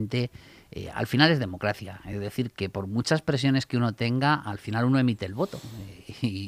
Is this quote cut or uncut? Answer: uncut